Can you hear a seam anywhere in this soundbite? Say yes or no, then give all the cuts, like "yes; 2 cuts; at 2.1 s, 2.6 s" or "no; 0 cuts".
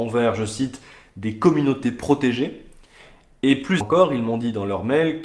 yes; 1 cut; at 3.8 s